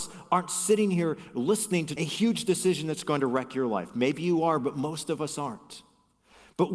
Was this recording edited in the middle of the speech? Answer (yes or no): yes